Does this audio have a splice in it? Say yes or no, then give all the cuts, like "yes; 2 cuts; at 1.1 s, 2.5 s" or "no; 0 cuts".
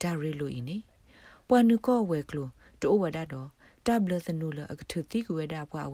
no; 0 cuts